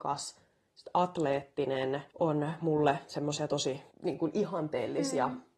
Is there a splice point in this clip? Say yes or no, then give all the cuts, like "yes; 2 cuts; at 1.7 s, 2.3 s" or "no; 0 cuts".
yes; 2 cuts; at 2.1 s, 3.9 s